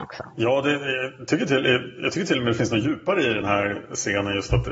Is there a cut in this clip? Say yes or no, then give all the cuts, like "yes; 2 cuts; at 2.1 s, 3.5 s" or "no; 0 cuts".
no; 0 cuts